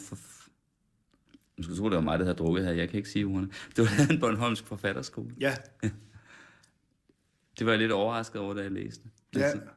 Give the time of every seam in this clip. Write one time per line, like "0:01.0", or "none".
none